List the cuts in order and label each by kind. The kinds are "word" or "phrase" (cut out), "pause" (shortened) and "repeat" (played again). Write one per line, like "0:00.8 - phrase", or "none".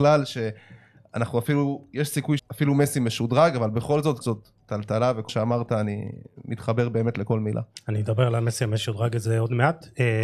0:02.4 - word
0:04.2 - word
0:05.3 - word